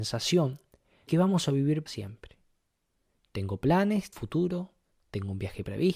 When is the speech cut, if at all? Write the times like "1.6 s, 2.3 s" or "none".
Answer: 1.1 s, 1.9 s, 4.1 s

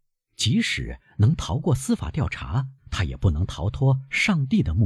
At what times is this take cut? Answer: 2.8 s

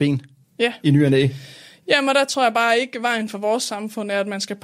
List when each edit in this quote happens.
none

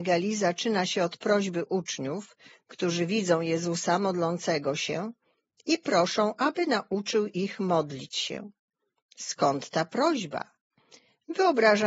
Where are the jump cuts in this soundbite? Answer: none

